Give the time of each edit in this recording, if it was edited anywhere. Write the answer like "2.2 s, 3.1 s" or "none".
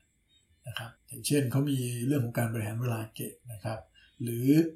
1.0 s